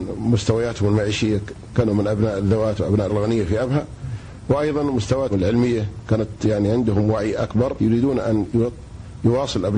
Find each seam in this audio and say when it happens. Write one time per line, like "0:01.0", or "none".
0:03.1
0:05.3
0:07.8